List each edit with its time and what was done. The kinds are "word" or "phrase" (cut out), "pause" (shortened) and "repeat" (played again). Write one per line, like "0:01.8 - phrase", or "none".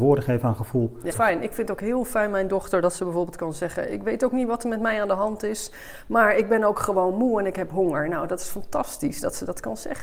0:01.1 - phrase